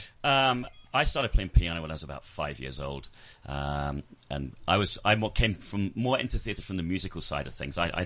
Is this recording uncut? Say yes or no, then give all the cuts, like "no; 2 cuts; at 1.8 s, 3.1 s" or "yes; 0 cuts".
yes; 0 cuts